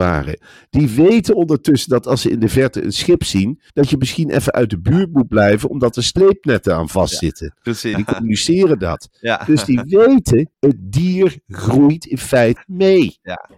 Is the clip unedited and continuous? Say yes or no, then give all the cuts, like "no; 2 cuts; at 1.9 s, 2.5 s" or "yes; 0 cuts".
no; 4 cuts; at 3.7 s, 7.9 s, 10.5 s, 12.6 s